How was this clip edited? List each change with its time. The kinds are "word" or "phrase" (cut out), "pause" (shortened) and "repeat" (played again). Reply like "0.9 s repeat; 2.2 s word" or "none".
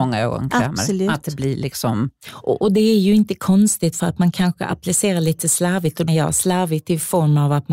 6.1 s word